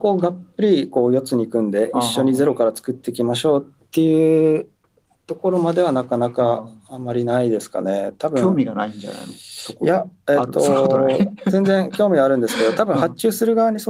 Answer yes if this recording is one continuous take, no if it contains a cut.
yes